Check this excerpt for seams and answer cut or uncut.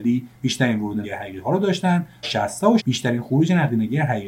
cut